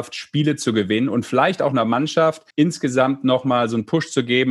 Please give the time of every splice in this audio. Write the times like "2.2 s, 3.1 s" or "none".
2.5 s